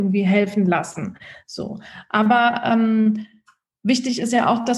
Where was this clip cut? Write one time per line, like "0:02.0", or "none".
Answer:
none